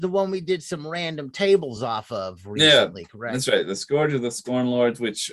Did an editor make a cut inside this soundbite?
no; 0 cuts

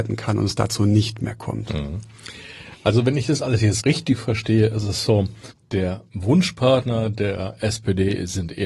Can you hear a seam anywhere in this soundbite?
yes; 2 cuts; at 3.8 s, 5.5 s

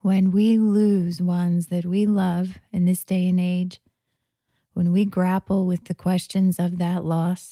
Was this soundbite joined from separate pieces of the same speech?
no; 0 cuts

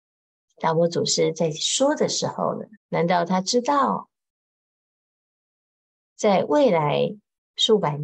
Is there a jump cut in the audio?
yes; 1 cut; at 2.8 s

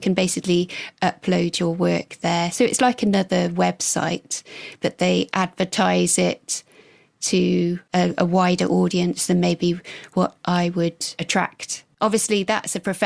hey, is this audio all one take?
yes; 0 cuts

